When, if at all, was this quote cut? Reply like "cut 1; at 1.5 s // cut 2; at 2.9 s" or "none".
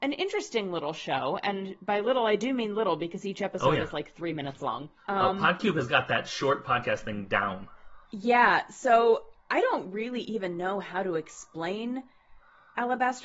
cut 1; at 5.0 s // cut 2; at 8.0 s // cut 3; at 9.4 s